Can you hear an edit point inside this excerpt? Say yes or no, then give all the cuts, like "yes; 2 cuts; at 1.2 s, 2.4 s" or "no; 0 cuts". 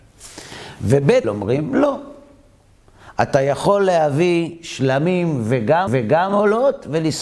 yes; 2 cuts; at 1.2 s, 5.9 s